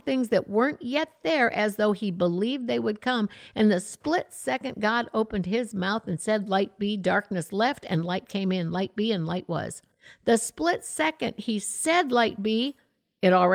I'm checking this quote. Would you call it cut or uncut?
cut